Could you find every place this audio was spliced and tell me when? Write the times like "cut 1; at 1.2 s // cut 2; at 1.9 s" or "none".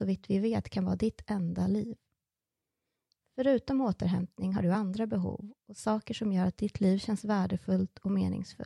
none

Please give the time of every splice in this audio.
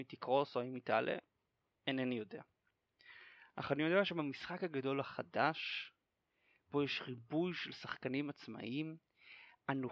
none

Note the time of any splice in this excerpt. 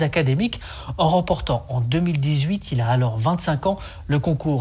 none

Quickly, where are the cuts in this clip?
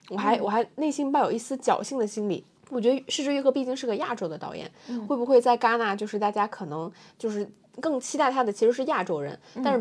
none

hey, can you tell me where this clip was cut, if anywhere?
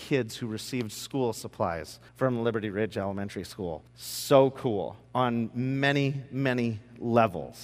cut 1; at 2.1 s // cut 2; at 3.9 s // cut 3; at 5.0 s

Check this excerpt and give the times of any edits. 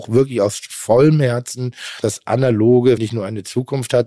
cut 1; at 2.0 s // cut 2; at 3.0 s

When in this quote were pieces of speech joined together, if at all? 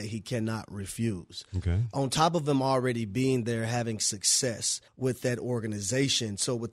cut 1; at 4.9 s

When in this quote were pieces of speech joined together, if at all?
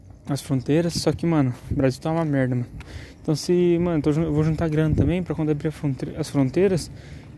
none

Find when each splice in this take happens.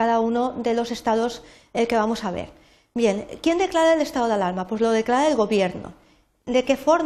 none

